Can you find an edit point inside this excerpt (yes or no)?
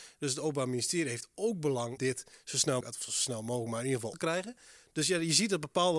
yes